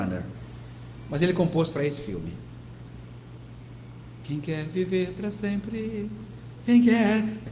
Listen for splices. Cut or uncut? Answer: uncut